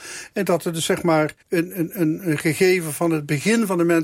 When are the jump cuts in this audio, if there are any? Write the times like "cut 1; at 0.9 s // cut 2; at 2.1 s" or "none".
cut 1; at 1.4 s